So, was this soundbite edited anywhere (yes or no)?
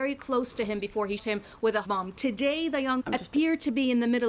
yes